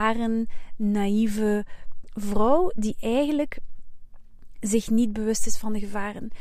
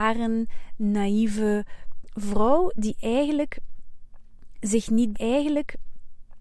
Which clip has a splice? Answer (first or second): second